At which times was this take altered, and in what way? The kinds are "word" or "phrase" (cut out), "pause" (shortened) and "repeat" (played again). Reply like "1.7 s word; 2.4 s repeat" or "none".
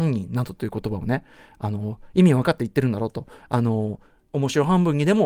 none